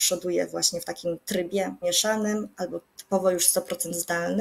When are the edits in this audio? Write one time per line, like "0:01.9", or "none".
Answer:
0:01.8